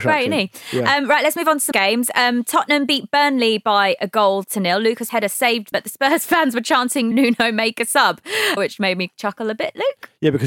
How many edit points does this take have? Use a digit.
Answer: 5